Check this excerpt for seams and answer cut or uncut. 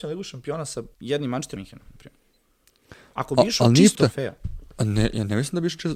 cut